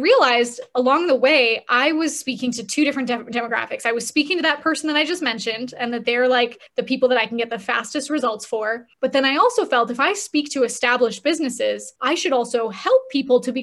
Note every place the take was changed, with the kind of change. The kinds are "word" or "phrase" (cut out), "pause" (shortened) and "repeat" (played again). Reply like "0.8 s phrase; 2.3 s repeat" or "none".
6.7 s pause; 8.9 s pause; 12.0 s pause